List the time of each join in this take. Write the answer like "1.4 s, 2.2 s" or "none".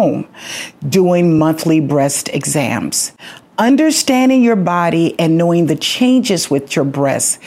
none